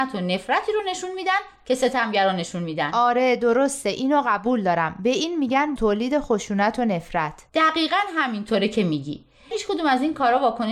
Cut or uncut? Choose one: cut